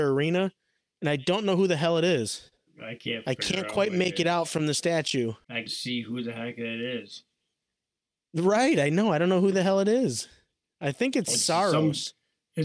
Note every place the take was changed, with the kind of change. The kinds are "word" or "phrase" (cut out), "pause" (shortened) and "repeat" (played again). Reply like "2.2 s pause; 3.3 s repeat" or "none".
2.7 s pause; 5.7 s word